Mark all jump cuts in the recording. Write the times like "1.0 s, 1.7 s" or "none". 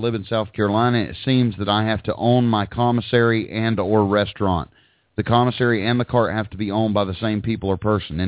none